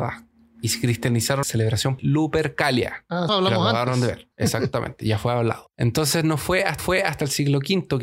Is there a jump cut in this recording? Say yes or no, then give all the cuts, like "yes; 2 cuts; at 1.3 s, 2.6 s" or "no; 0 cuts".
yes; 5 cuts; at 1.4 s, 2.0 s, 3.3 s, 4.3 s, 6.8 s